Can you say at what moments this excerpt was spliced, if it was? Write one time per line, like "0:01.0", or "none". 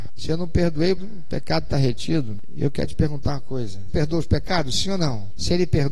0:01.0
0:03.9